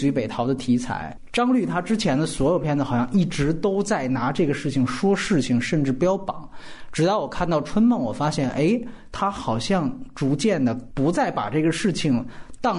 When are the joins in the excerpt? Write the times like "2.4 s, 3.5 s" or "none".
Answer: none

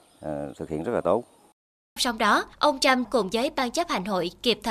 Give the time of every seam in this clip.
2.0 s, 2.5 s, 3.0 s

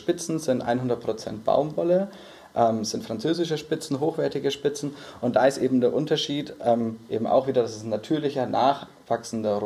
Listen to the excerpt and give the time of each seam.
none

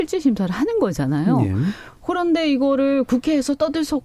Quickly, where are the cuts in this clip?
none

